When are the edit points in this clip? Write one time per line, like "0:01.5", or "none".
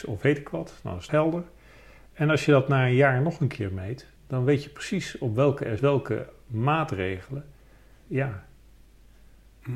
0:01.1
0:04.2
0:05.8
0:08.0